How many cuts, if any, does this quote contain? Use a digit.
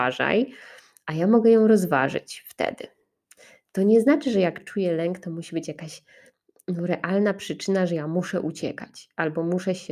0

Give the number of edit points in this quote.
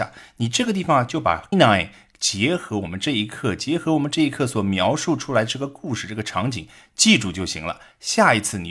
1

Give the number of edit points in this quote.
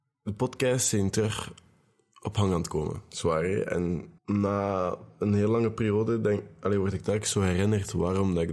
1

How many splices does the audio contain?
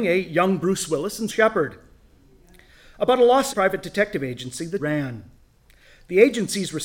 3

